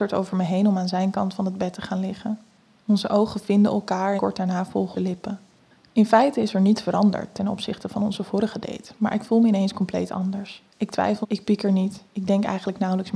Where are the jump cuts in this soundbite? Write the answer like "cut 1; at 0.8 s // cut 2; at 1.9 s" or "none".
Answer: cut 1; at 4.2 s // cut 2; at 4.9 s // cut 3; at 10.7 s // cut 4; at 11.2 s